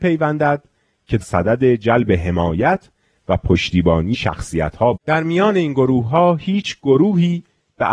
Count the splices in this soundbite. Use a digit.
3